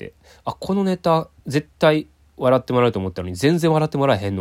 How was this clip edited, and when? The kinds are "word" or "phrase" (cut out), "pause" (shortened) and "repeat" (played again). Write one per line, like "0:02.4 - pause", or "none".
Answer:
0:01.4 - pause